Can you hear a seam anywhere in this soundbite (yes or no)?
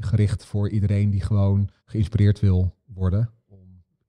yes